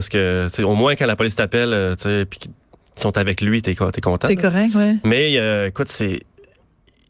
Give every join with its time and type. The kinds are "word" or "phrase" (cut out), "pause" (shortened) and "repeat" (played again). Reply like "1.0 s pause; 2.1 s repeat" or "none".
none